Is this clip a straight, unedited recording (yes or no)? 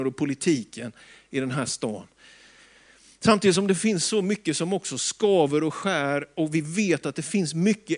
yes